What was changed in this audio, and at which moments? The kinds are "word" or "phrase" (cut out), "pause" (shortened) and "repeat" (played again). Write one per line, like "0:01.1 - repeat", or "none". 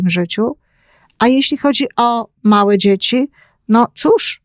none